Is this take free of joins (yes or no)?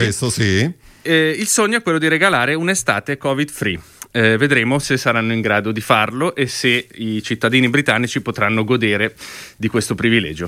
yes